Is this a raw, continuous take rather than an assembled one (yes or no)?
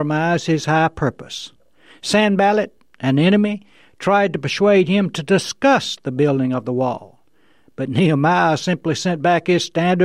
yes